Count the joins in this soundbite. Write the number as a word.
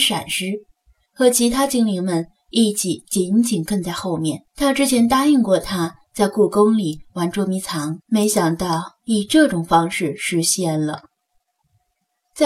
two